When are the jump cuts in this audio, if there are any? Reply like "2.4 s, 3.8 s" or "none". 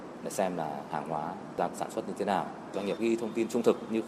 1.7 s, 3.0 s